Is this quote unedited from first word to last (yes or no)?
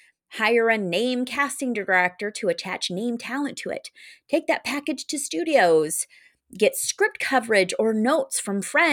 yes